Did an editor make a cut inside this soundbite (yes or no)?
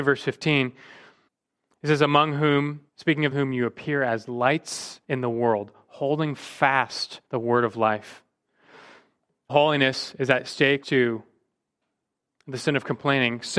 yes